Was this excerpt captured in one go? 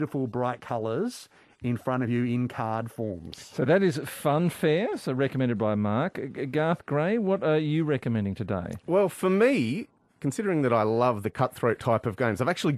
yes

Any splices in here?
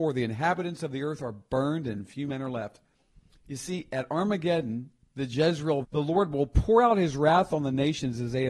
yes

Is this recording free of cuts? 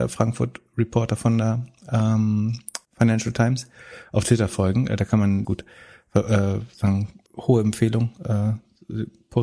no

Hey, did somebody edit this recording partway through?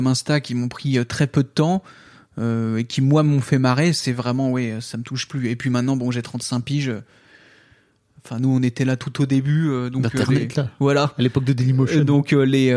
no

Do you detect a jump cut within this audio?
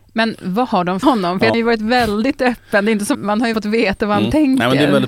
yes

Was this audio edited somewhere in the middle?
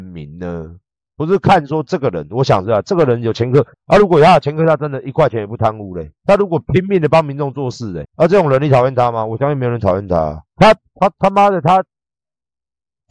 yes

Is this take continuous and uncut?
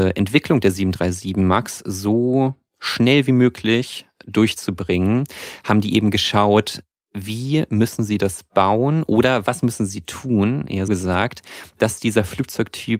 no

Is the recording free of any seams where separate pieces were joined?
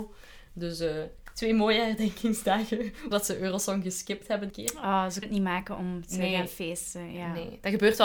no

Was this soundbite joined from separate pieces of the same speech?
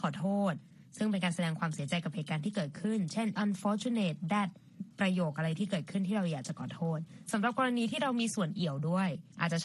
yes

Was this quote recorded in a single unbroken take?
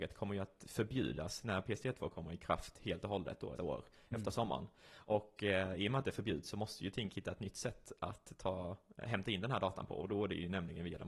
no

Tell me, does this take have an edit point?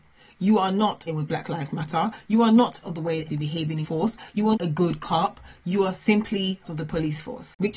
yes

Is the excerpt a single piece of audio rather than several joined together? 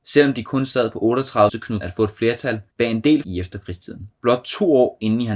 no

